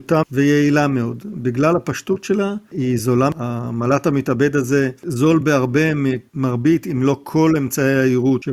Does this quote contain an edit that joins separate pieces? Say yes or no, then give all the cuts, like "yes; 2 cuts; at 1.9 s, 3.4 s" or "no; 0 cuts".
no; 0 cuts